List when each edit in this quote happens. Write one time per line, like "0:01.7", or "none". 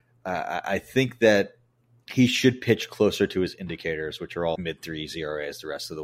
0:01.8
0:04.5

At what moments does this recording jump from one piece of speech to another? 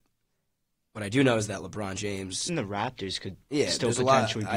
0:02.5

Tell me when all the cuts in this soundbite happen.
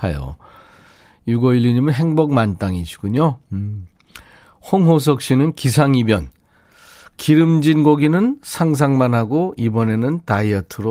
none

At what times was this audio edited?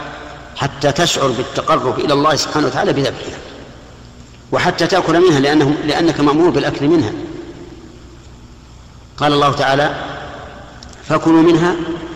none

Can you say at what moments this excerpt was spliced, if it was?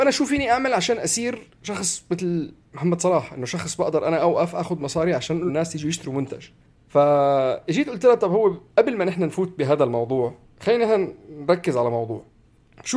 0:05.5

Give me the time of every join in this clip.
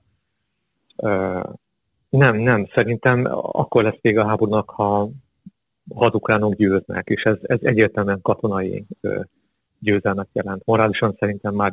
none

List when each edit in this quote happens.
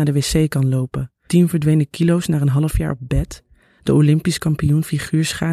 0:01.3

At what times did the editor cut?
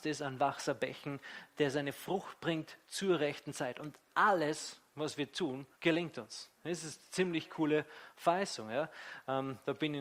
0:05.7
0:06.5

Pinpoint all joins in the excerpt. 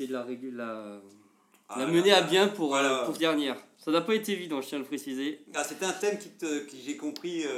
0:03.2

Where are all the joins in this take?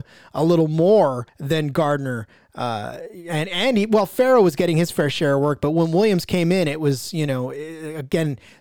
0:01.3

